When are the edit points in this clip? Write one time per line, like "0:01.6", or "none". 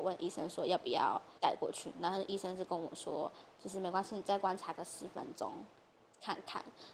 0:01.4